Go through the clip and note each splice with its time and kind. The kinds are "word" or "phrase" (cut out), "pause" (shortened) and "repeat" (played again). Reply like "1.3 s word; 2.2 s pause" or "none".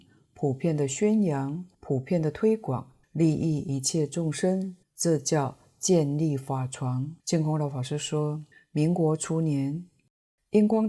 1.7 s pause; 3.0 s pause; 4.8 s pause; 7.2 s pause; 8.5 s pause